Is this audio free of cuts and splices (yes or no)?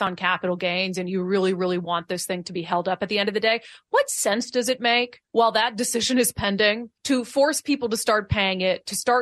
no